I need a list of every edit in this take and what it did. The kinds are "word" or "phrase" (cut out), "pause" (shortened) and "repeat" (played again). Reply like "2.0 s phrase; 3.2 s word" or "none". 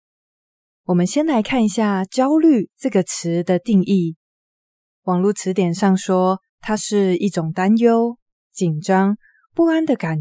6.5 s pause